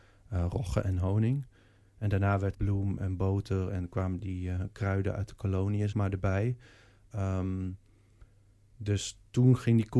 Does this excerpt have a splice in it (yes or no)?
yes